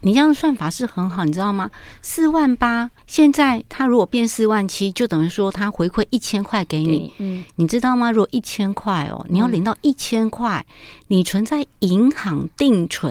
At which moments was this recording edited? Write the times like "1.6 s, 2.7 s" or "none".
3.0 s